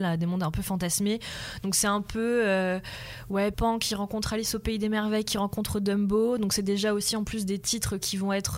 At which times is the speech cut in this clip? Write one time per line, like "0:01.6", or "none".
0:03.5